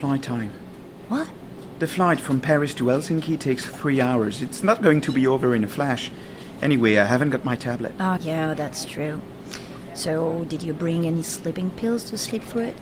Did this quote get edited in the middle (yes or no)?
yes